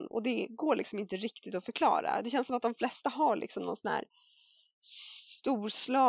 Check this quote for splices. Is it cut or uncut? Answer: uncut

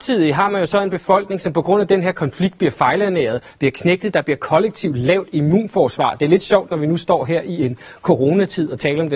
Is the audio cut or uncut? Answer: uncut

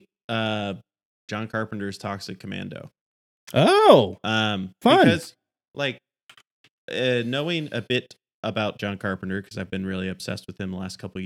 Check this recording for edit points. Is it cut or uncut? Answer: uncut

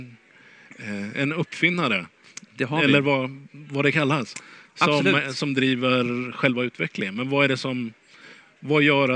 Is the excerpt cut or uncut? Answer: uncut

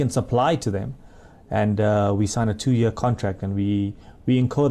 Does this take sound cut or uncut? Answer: uncut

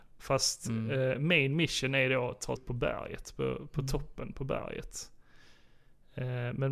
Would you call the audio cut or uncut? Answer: cut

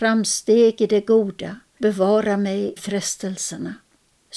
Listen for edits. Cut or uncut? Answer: cut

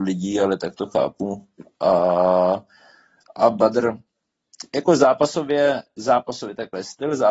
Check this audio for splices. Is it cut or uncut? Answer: uncut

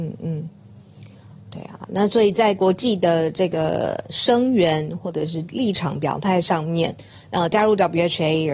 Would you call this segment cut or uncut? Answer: uncut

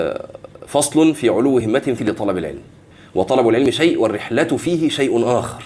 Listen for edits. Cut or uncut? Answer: cut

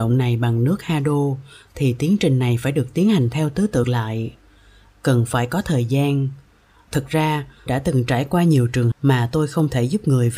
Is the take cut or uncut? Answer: cut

